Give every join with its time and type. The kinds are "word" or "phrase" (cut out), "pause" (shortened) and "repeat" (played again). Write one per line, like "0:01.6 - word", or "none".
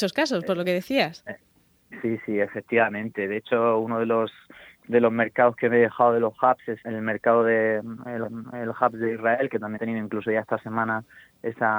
0:06.8 - word
0:08.2 - repeat
0:09.8 - word